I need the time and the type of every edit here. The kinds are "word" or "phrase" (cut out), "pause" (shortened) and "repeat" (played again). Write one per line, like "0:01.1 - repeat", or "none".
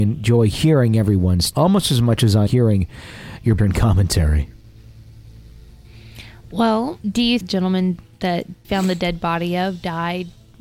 0:01.5 - word
0:02.5 - word
0:03.6 - word
0:07.0 - pause
0:07.4 - phrase
0:08.6 - word

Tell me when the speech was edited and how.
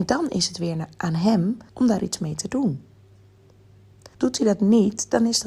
0:01.7 - pause
0:04.1 - pause

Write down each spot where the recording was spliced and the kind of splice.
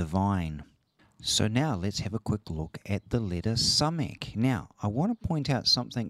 0:01.0 - pause

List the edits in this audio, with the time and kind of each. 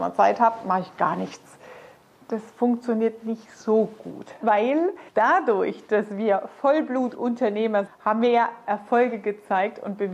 0:04.4 - word
0:05.1 - pause
0:07.9 - word

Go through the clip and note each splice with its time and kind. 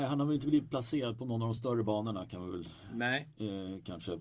none

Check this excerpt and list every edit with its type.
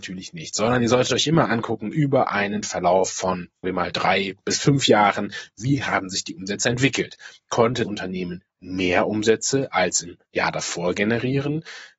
0:03.6 - word
0:07.8 - word
0:10.3 - pause

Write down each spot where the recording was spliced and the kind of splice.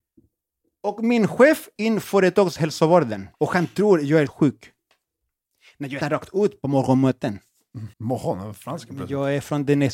0:01.8 - word
0:03.3 - pause
0:04.3 - word
0:06.0 - word
0:07.9 - pause

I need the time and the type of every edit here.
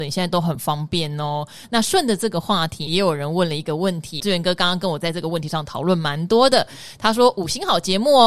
0:02.9 - word
0:04.2 - word

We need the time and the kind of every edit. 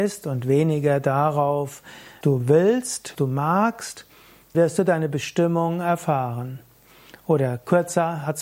0:02.2 - word
0:03.1 - word
0:04.5 - word

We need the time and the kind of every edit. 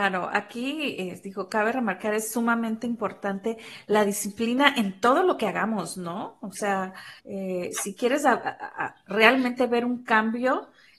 0:07.2 - pause

